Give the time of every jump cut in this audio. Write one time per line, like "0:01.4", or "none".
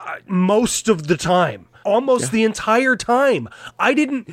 0:01.8